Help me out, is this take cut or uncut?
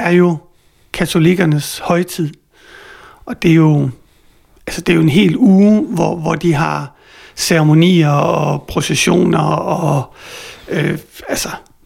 uncut